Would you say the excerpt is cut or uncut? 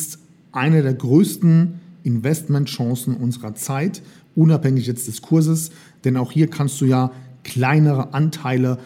uncut